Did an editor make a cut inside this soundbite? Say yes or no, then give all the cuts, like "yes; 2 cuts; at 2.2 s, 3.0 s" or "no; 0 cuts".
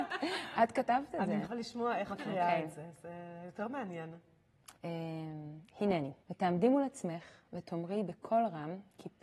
yes; 4 cuts; at 1.4 s, 2.1 s, 4.7 s, 6.2 s